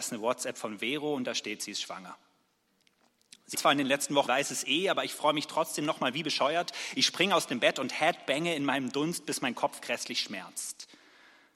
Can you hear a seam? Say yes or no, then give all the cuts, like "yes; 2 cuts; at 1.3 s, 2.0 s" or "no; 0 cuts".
yes; 2 cuts; at 3.5 s, 4.3 s